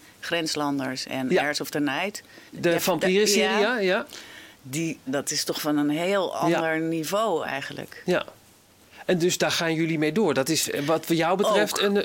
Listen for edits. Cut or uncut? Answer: cut